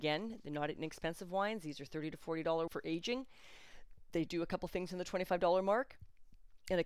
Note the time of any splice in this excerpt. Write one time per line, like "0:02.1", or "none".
0:02.7
0:04.3